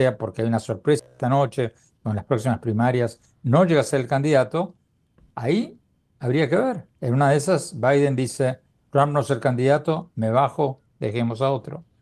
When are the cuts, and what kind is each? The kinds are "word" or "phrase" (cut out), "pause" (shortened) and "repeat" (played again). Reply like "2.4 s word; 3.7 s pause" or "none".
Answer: none